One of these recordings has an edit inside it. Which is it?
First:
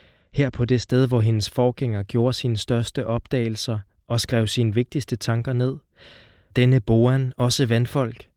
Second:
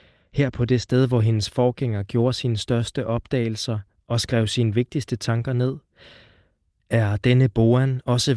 first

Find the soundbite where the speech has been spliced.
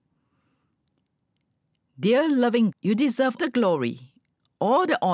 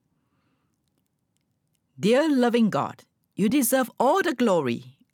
first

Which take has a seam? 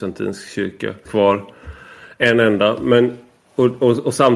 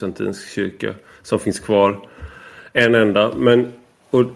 first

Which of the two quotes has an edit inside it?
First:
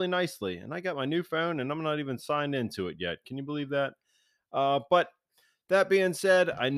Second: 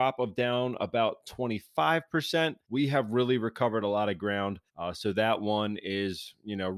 second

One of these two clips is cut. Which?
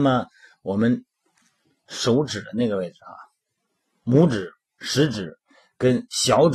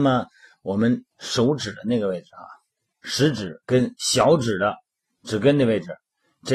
second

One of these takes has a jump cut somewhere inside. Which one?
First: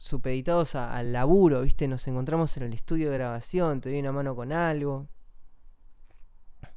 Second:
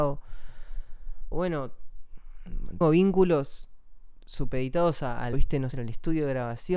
second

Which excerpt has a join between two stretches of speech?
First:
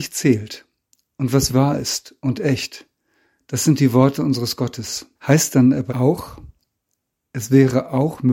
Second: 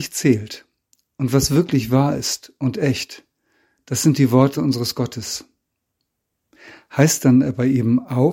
first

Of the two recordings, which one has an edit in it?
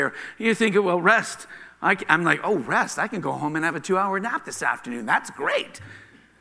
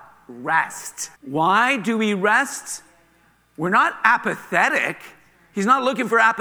second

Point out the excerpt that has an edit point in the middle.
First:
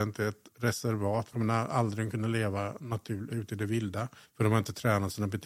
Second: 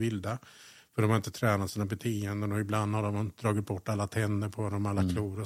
first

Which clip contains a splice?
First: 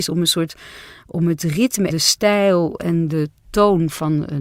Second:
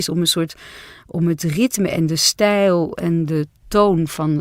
first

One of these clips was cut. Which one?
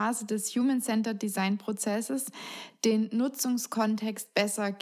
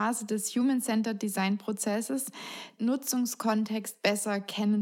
second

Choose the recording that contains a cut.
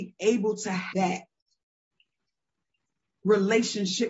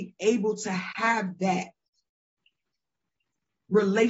first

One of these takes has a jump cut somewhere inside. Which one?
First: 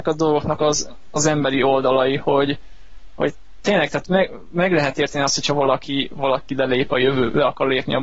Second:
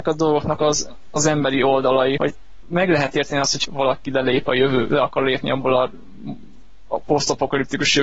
second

